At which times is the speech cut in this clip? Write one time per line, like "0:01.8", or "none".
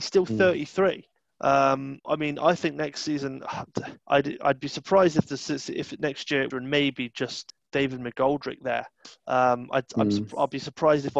0:02.0
0:04.0
0:06.5